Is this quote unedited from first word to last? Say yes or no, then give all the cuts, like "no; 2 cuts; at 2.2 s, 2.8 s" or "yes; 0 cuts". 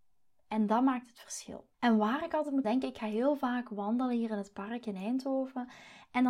no; 2 cuts; at 1.7 s, 2.6 s